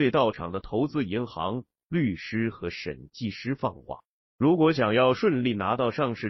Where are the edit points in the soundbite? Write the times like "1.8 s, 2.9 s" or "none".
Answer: none

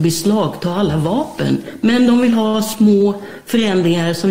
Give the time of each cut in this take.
none

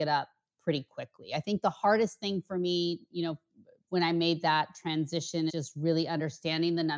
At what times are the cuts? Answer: 3.9 s, 5.5 s

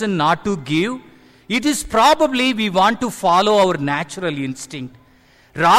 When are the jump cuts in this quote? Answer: none

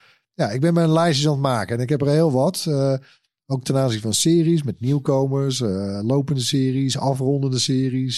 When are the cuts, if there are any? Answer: none

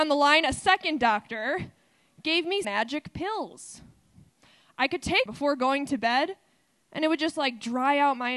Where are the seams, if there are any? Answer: 2.6 s, 5.3 s

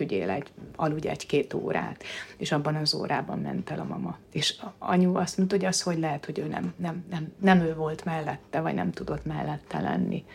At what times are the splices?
4.3 s

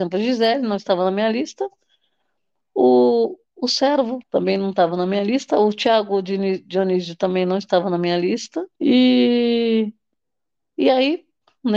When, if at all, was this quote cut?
4.2 s, 8.8 s

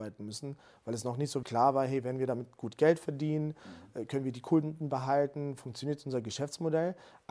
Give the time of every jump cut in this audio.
1.4 s

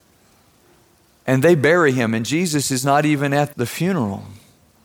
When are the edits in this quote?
3.5 s

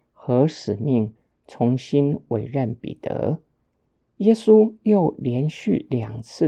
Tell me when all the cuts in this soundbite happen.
none

